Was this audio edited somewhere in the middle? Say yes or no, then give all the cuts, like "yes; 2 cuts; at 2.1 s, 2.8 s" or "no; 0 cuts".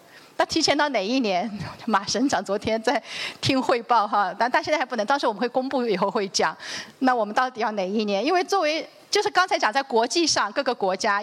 no; 0 cuts